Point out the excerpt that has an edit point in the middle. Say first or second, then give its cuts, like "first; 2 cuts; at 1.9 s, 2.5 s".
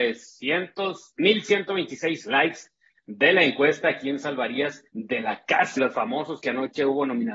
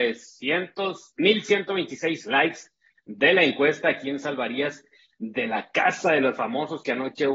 first; 2 cuts; at 4.9 s, 5.8 s